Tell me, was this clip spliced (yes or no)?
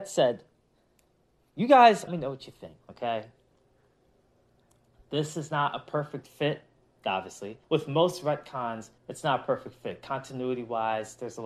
yes